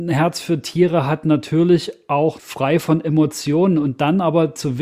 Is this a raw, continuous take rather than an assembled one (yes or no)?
no